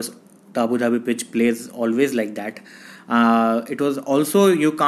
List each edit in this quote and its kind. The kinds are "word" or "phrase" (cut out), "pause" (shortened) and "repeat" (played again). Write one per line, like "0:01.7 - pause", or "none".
none